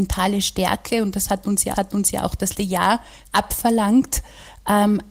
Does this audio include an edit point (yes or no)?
yes